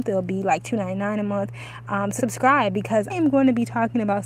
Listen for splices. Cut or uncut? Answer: cut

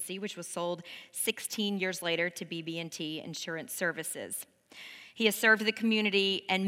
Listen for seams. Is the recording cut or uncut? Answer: uncut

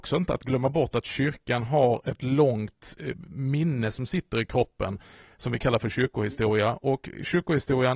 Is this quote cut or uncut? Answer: uncut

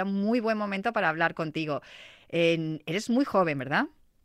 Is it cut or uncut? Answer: uncut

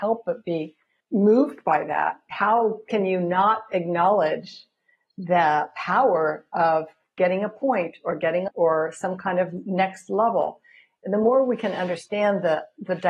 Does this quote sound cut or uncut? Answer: cut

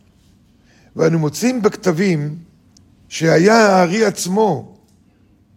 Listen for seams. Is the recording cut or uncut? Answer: cut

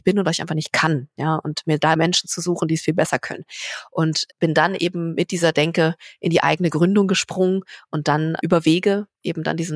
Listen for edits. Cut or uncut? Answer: cut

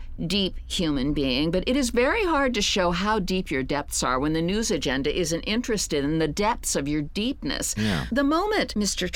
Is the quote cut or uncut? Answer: uncut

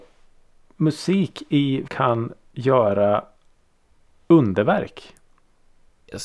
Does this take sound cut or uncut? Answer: cut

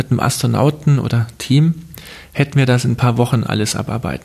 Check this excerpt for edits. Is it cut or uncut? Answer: uncut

